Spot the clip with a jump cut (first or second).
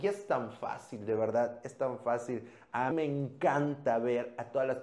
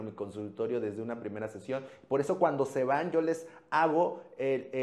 first